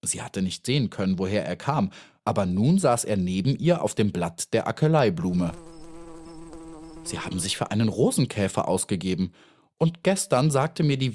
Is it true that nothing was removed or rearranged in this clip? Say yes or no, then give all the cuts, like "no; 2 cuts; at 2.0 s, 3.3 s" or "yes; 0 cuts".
yes; 0 cuts